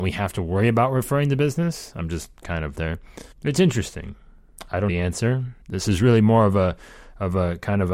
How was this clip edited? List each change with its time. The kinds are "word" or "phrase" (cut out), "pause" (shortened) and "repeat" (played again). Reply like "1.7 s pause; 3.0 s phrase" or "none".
2.7 s phrase; 3.3 s pause; 4.9 s word; 5.6 s pause